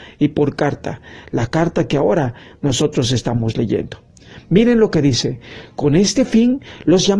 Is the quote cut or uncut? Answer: uncut